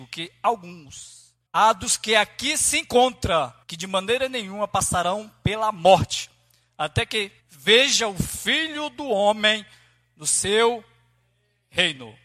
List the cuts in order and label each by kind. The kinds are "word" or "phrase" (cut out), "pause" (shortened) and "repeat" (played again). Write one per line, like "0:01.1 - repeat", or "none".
0:01.5 - pause
0:03.6 - pause
0:07.4 - pause